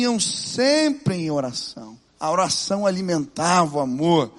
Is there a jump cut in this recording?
yes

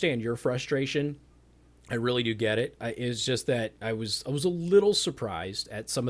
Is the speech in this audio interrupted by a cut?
no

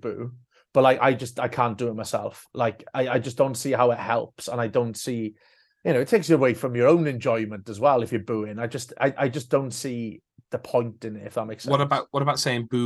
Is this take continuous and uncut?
yes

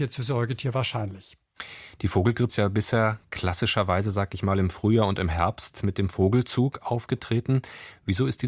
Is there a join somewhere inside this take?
yes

